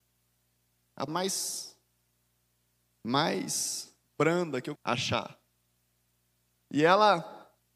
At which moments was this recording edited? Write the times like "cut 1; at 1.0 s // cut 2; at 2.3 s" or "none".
cut 1; at 1.1 s // cut 2; at 4.8 s